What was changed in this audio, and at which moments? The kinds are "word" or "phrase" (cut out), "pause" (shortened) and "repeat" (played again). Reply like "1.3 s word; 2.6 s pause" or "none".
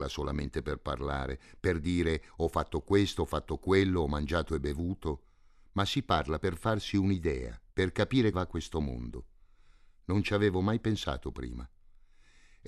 7.7 s pause; 8.3 s word